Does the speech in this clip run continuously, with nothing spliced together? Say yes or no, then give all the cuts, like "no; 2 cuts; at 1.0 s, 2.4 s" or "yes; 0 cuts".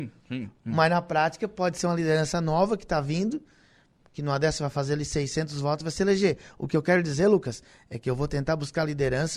yes; 0 cuts